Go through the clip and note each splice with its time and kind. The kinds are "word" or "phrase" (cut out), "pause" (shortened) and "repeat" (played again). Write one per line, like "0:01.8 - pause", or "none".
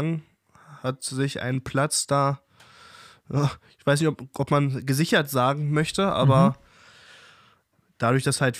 none